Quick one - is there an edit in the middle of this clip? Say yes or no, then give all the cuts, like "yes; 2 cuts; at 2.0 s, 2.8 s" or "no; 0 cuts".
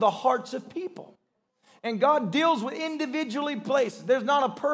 no; 0 cuts